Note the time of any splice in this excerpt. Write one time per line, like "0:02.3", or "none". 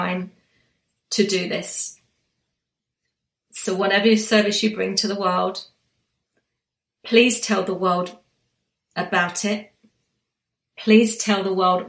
none